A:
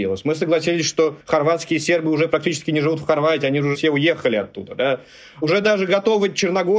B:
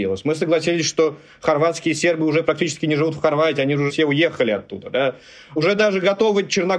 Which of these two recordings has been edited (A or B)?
A